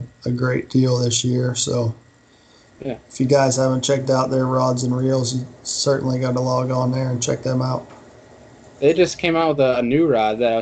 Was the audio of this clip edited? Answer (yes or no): no